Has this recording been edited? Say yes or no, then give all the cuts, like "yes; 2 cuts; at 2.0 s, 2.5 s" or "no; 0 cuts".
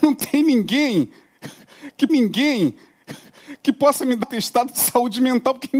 yes; 2 cuts; at 2.1 s, 4.2 s